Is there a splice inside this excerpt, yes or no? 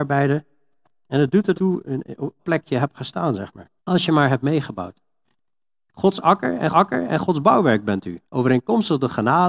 yes